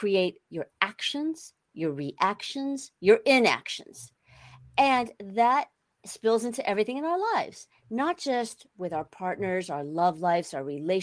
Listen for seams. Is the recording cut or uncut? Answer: uncut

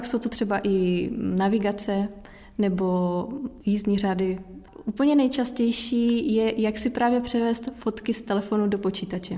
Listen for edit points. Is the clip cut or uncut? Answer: uncut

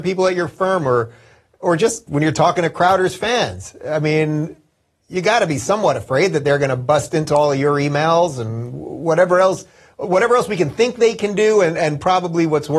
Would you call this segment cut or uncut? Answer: uncut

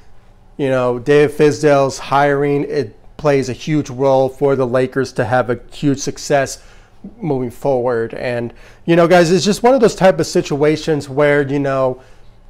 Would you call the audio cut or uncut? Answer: uncut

